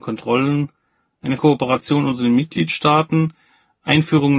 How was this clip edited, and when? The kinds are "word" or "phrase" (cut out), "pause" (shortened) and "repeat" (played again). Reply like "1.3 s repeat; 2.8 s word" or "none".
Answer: 1.4 s word

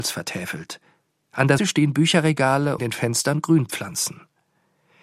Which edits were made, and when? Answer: 1.6 s word; 2.8 s phrase

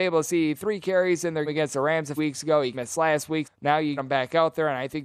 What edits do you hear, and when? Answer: 1.5 s word; 2.2 s word; 2.7 s word; 3.4 s word; 4.0 s word

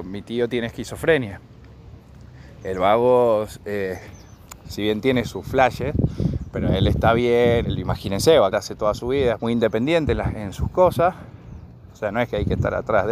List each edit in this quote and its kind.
7.6 s word; 8.5 s word; 9.4 s word

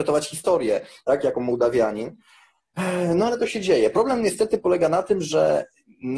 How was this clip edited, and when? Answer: none

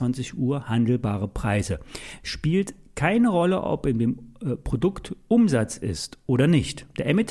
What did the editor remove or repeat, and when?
none

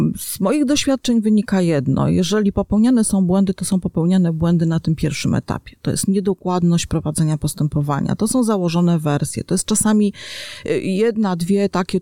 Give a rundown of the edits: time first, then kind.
none

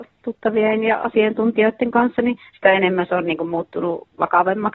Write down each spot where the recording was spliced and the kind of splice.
2.5 s pause

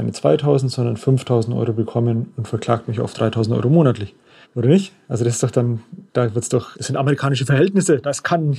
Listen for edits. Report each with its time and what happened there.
4.4 s pause; 6.1 s pause; 6.7 s word

